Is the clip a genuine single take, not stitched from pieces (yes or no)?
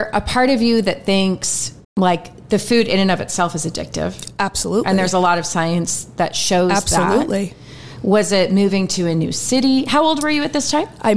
no